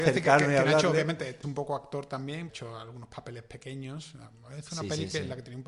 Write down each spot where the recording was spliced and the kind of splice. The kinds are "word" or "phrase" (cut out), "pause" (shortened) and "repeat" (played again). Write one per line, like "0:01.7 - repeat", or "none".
0:01.4 - word
0:02.5 - phrase